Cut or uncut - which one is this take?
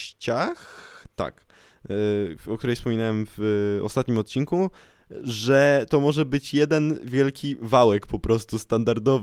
uncut